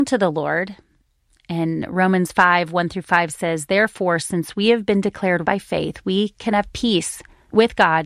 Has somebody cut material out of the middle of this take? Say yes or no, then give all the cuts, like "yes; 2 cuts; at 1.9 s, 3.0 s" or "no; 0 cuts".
yes; 1 cut; at 5.4 s